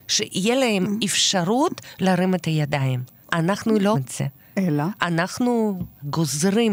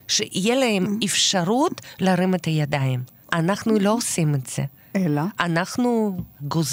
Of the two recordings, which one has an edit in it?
first; 1 cut; at 3.9 s

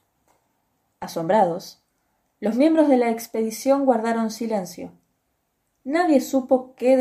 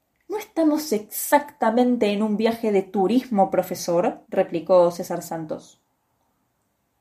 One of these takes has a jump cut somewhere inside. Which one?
second; 1 cut; at 4.2 s

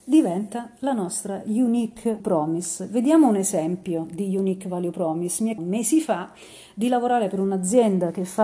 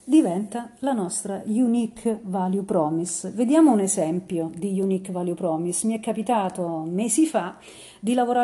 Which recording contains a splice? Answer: first; 2 cuts; at 2.2 s, 5.6 s

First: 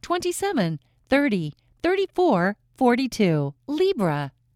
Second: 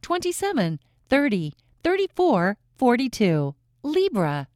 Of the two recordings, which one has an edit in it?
first; 1 cut; at 3.6 s

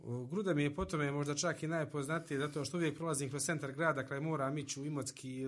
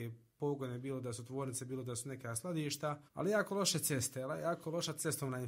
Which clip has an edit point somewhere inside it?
second; 1 cut; at 3.1 s

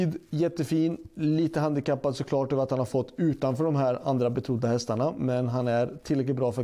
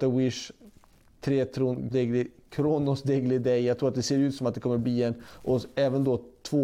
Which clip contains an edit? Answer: second; 1 cut; at 1.9 s

